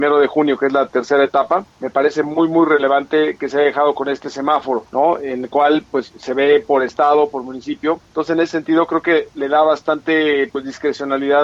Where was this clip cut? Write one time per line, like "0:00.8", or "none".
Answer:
0:01.7
0:04.9
0:08.0